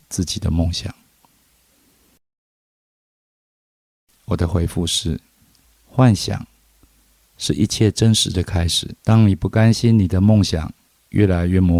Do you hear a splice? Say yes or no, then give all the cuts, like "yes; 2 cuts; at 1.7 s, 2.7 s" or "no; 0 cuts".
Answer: yes; 2 cuts; at 5.6 s, 9.0 s